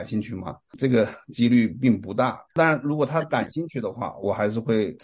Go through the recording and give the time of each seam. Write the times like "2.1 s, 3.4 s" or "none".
2.5 s